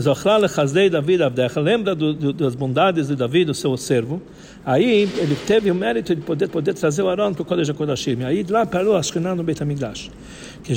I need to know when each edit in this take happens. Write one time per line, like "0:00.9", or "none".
0:06.5